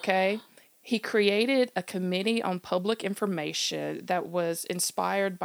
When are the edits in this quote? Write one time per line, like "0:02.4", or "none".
none

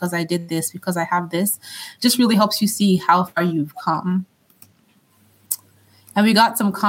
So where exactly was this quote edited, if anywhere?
none

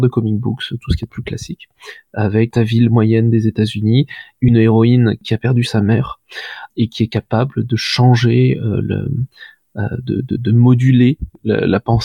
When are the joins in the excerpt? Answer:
none

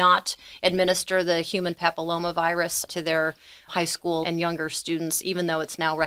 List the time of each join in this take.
0:02.9
0:03.7
0:04.2

